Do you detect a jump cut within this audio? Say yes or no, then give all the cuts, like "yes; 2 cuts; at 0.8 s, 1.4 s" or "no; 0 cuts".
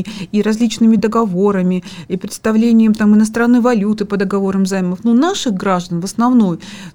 yes; 1 cut; at 1.0 s